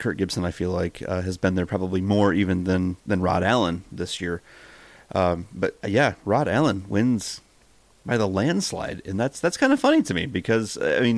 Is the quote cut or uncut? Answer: uncut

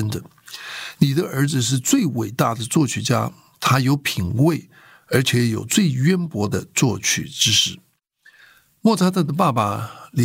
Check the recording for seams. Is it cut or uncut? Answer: uncut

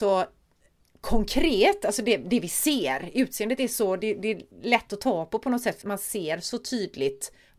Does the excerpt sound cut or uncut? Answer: cut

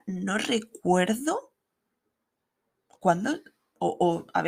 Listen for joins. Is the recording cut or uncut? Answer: uncut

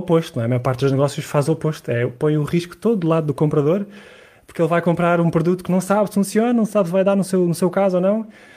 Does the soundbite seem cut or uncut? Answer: uncut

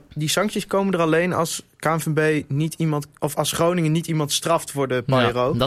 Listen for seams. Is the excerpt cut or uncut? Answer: uncut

